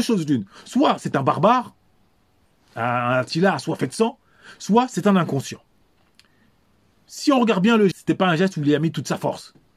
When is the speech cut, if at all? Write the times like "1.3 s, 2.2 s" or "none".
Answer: 7.9 s